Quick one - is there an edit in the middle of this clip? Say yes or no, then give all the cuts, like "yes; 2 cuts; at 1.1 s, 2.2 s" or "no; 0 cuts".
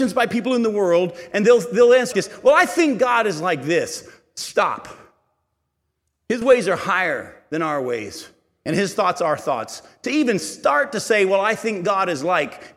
yes; 1 cut; at 2.1 s